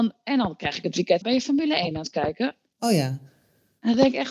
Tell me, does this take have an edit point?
yes; 1 cut; at 1.2 s

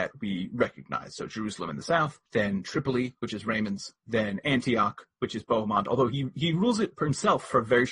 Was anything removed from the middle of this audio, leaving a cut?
yes; 2 cuts; at 2.3 s, 4.0 s

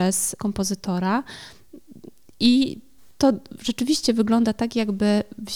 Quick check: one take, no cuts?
yes; 0 cuts

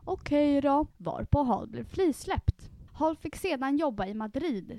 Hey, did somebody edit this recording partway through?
yes; 2 cuts; at 0.9 s, 2.9 s

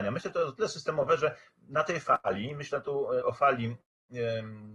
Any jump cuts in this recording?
yes; 1 cut; at 3.2 s

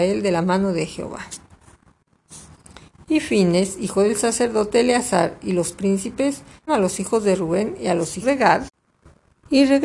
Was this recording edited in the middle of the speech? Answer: yes; 2 cuts; at 6.7 s, 8.2 s

